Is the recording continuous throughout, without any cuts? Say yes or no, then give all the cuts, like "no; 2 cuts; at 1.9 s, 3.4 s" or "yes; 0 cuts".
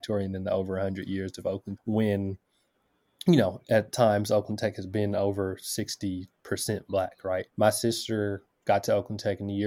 no; 2 cuts; at 1.8 s, 7.5 s